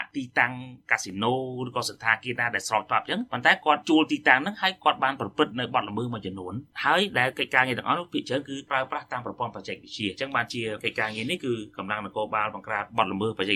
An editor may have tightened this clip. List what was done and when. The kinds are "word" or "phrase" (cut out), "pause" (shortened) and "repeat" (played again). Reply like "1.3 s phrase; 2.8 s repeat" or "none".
none